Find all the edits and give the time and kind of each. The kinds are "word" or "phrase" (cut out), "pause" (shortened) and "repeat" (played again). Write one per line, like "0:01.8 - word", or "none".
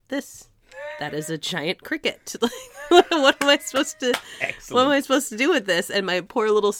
none